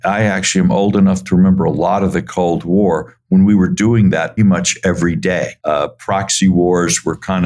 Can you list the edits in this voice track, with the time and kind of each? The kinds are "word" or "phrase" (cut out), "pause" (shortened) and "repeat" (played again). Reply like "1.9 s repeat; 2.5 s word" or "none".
4.4 s word; 5.6 s pause